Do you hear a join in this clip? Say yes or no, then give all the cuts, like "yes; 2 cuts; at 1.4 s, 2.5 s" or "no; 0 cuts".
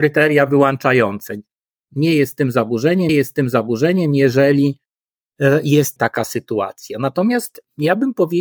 yes; 2 cuts; at 3.1 s, 6.0 s